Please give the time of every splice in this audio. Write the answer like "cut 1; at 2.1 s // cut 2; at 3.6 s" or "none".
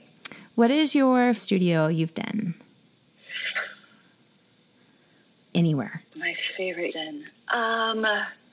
cut 1; at 1.4 s // cut 2; at 2.1 s // cut 3; at 5.5 s // cut 4; at 6.1 s // cut 5; at 6.9 s